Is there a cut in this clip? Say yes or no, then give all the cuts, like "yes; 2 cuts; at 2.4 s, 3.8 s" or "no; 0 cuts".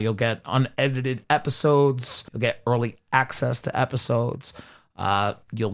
yes; 1 cut; at 2.3 s